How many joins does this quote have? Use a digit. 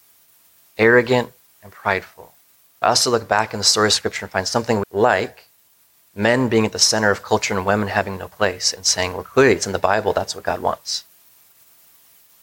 2